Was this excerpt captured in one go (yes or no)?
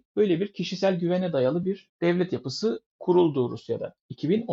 yes